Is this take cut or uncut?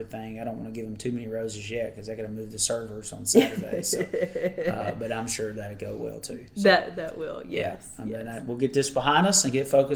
uncut